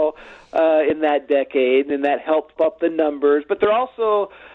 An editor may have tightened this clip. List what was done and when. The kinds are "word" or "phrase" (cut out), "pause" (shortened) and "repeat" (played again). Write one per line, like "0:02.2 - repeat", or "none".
0:02.6 - word